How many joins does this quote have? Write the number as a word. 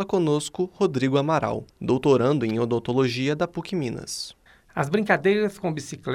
two